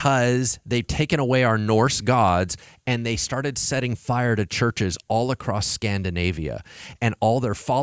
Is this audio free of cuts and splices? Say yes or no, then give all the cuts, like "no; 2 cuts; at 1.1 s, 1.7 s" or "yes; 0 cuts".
yes; 0 cuts